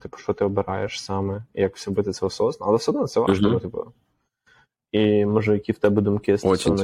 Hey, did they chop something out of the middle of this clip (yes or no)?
no